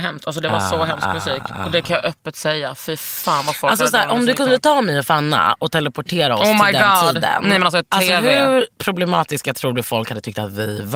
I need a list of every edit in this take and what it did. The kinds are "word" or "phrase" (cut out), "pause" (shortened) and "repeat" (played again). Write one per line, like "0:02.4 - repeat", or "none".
none

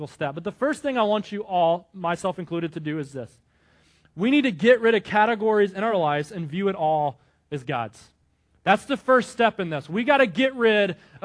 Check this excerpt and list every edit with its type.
none

